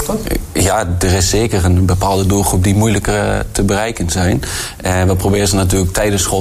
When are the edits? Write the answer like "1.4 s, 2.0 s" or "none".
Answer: none